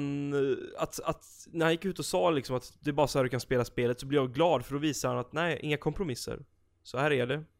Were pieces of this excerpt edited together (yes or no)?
no